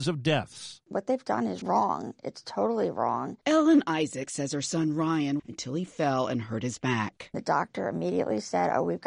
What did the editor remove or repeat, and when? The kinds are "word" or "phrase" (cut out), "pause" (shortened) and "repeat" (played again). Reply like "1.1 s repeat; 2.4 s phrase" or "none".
1.6 s word; 5.4 s phrase